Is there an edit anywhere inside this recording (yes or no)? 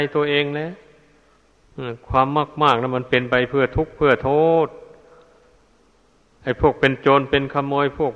no